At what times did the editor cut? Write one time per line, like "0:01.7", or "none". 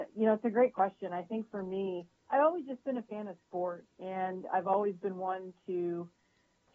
0:02.2
0:03.9